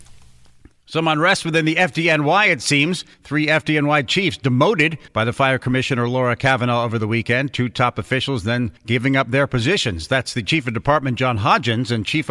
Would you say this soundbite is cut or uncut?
cut